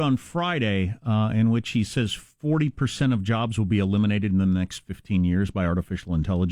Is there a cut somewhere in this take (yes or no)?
no